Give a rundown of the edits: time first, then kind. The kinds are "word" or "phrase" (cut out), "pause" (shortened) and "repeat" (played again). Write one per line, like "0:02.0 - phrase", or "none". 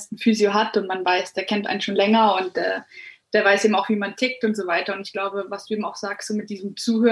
none